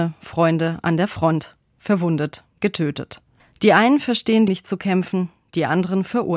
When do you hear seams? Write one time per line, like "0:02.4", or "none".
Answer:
0:04.5